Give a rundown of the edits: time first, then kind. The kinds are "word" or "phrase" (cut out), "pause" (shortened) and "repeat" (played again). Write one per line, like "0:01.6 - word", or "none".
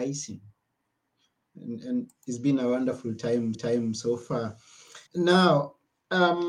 0:03.5 - repeat
0:05.1 - pause